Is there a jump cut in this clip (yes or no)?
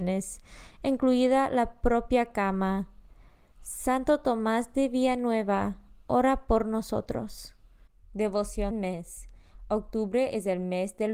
yes